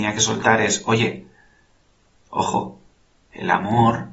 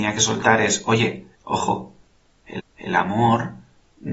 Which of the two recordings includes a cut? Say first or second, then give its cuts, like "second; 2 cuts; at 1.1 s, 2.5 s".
second; 2 cuts; at 1.3 s, 2.6 s